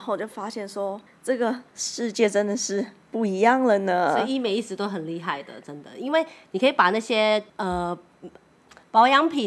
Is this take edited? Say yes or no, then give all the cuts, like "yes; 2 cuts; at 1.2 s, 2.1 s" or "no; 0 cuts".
yes; 3 cuts; at 1.1 s, 1.7 s, 7.5 s